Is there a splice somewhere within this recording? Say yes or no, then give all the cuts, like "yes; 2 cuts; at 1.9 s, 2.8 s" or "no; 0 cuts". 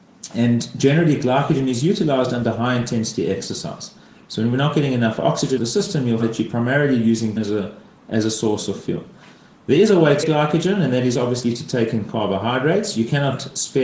yes; 4 cuts; at 5.6 s, 6.2 s, 7.4 s, 10.2 s